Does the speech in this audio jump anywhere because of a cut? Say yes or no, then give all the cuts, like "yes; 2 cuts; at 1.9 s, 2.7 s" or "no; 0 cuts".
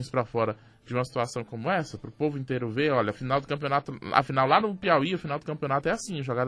no; 0 cuts